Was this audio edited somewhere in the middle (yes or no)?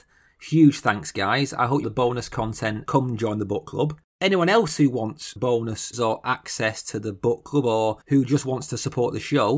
yes